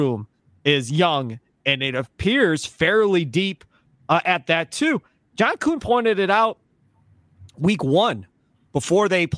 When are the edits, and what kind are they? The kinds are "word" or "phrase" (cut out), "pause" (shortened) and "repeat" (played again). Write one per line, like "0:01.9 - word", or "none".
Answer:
none